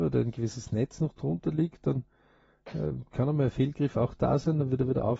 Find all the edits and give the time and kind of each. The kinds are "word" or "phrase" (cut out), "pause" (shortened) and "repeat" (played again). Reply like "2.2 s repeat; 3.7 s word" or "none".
none